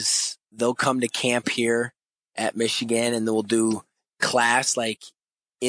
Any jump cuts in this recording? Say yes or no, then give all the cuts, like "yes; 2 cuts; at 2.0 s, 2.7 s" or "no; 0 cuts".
no; 0 cuts